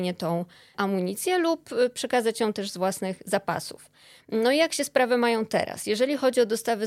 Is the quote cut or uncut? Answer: uncut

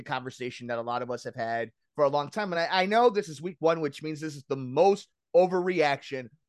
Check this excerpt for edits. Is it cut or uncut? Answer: uncut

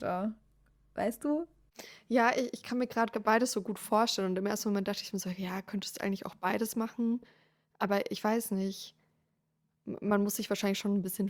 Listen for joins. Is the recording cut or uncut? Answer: uncut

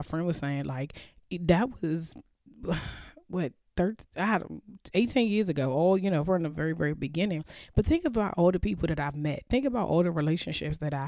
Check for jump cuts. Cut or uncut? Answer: uncut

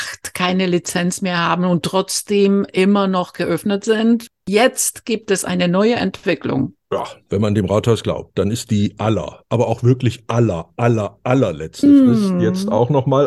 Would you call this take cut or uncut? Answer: uncut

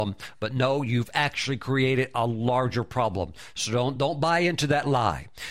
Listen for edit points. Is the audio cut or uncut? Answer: uncut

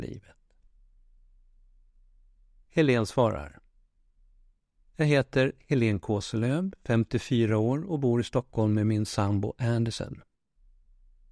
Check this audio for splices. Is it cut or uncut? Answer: uncut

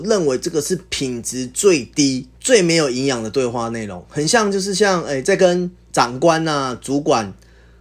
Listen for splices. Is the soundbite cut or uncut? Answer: cut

